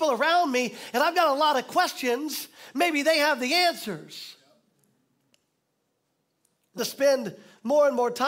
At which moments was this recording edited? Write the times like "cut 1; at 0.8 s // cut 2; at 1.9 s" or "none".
cut 1; at 6.8 s